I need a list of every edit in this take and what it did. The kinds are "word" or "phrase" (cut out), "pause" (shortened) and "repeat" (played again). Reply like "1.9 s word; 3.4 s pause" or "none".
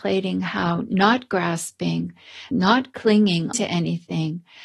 2.5 s word; 3.5 s word